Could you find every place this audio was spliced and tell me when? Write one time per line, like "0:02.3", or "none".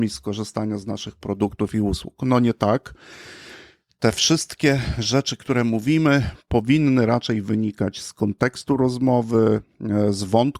none